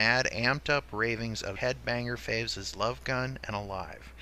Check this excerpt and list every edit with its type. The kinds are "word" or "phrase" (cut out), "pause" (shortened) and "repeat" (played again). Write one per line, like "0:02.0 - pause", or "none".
0:01.6 - word